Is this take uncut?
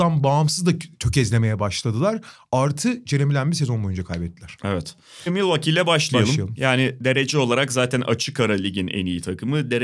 yes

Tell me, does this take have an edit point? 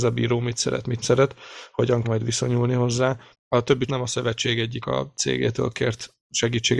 yes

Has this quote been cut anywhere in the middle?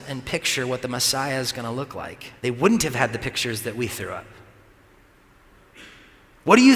yes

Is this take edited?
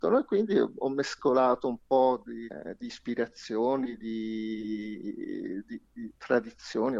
no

